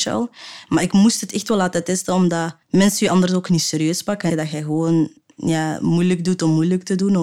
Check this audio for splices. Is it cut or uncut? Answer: cut